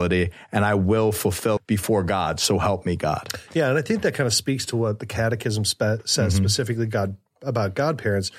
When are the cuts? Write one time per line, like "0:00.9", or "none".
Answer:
0:01.6